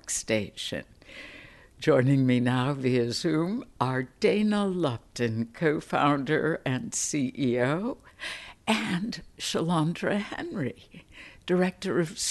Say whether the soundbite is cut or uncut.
uncut